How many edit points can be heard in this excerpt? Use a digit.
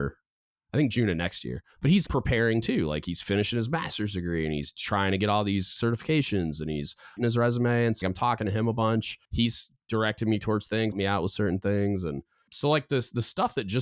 7